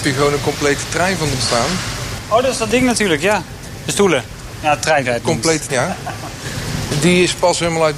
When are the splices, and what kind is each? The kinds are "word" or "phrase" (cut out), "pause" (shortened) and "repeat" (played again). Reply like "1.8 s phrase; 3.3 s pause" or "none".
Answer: 1.4 s word; 5.0 s word; 5.7 s word